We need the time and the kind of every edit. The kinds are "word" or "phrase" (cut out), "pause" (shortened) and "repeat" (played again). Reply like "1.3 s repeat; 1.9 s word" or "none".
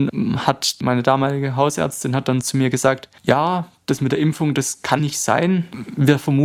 5.0 s word